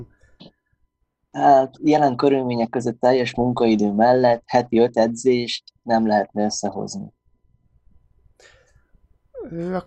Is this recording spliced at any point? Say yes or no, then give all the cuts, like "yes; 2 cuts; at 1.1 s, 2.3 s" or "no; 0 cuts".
no; 0 cuts